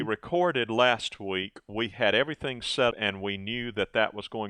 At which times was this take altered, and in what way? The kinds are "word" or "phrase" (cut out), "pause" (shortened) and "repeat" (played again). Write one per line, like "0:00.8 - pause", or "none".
0:02.9 - word